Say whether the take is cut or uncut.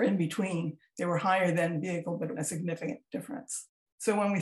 cut